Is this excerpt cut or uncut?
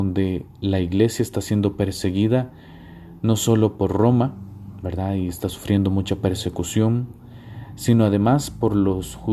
uncut